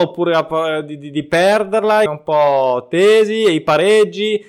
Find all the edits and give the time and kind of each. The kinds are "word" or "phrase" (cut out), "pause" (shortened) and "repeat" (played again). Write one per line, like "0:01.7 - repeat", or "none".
0:02.1 - phrase